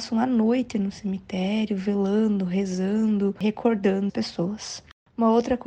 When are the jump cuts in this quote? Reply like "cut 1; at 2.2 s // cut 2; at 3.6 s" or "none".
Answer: cut 1; at 4.1 s